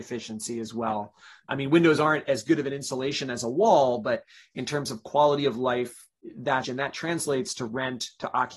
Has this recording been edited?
yes; 2 cuts; at 1.5 s, 6.6 s

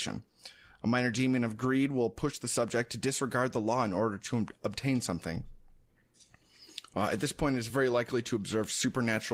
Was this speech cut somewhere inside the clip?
no; 0 cuts

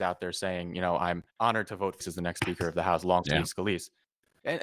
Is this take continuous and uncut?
no; 4 cuts; at 1.3 s, 1.7 s, 2.0 s, 3.2 s

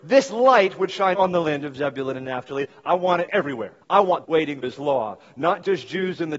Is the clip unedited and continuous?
no; 5 cuts; at 1.1 s, 3.3 s, 3.8 s, 4.2 s, 4.6 s

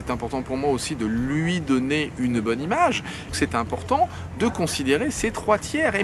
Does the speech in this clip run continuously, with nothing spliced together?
no; 1 cut; at 3.3 s

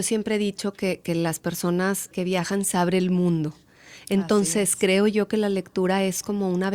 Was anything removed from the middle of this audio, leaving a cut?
yes; 2 cuts; at 2.1 s, 2.7 s

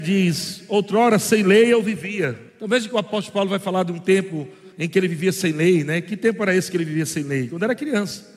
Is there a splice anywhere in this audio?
yes; 2 cuts; at 2.5 s, 4.7 s

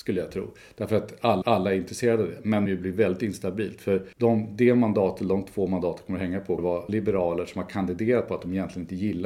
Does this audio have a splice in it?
yes; 5 cuts; at 1.4 s, 2.7 s, 4.1 s, 6.6 s, 6.9 s

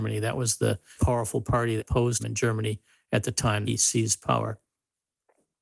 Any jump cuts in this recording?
yes; 4 cuts; at 1.0 s, 1.8 s, 2.2 s, 3.6 s

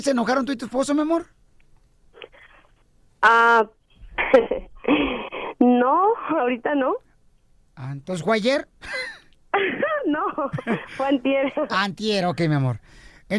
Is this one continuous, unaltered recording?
yes; 0 cuts

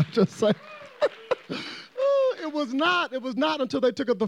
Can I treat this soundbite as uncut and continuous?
yes; 0 cuts

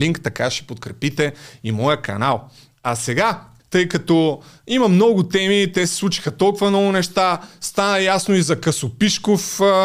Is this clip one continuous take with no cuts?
yes; 0 cuts

